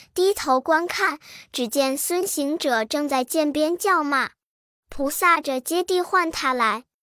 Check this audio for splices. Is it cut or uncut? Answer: uncut